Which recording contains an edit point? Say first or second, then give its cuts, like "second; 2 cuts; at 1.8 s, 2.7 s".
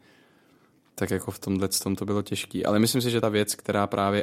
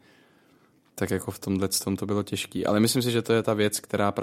first; 1 cut; at 3.2 s